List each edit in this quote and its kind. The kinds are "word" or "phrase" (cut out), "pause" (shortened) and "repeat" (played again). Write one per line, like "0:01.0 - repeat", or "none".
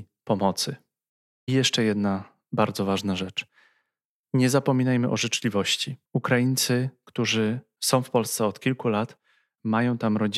0:06.1 - pause